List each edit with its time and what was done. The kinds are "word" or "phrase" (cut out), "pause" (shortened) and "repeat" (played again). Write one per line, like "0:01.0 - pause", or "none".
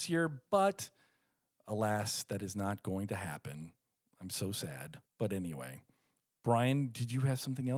0:05.1 - pause